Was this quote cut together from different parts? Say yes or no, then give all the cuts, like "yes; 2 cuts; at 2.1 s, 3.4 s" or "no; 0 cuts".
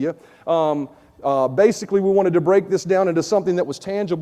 no; 0 cuts